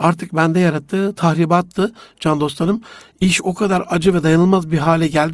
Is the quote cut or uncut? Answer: uncut